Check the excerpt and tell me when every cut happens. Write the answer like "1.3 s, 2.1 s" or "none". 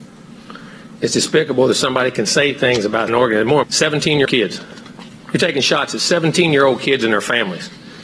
3.1 s, 3.6 s, 4.3 s